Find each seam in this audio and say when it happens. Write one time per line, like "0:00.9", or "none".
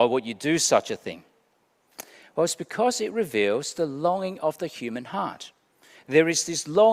none

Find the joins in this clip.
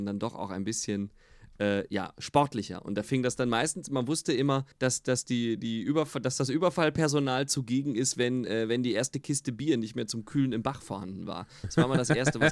0:04.7

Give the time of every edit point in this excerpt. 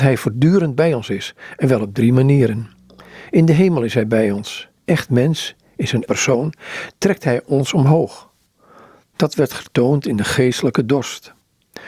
0:04.8
0:06.0

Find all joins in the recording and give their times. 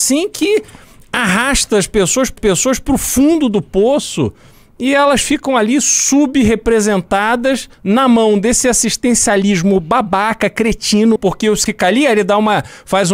0:02.4
0:07.7
0:11.2
0:11.7

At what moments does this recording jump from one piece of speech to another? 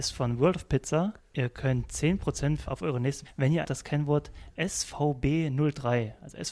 0:01.2
0:02.7
0:03.2
0:03.6

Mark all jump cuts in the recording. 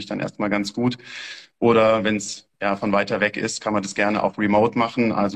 none

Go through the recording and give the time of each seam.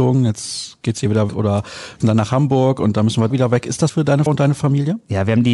0:01.3
0:02.0
0:03.3
0:03.9
0:04.3

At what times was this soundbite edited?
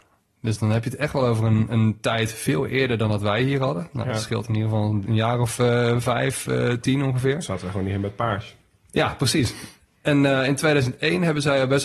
none

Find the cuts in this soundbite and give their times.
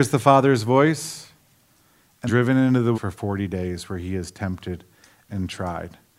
0:02.3
0:02.9

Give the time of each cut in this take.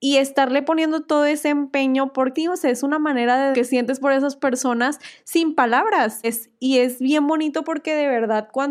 0:02.3
0:03.5
0:06.2

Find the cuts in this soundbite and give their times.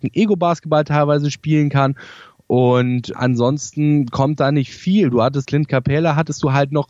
0:03.1
0:05.4

